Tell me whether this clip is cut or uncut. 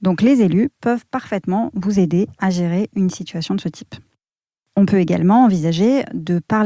uncut